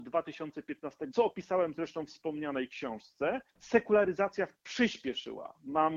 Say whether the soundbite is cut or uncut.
cut